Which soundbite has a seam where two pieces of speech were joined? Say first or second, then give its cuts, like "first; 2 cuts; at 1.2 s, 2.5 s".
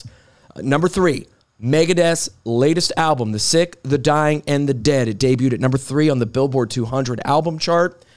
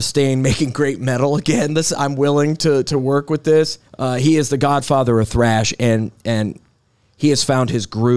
second; 1 cut; at 3.9 s